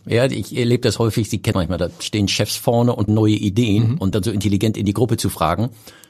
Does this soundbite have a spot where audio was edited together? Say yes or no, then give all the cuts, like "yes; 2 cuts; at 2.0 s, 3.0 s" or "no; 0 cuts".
yes; 3 cuts; at 1.5 s, 3.1 s, 4.1 s